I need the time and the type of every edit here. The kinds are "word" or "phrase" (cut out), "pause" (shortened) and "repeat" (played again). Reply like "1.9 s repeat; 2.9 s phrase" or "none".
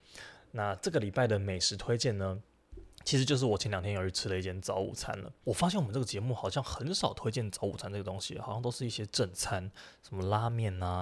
2.9 s pause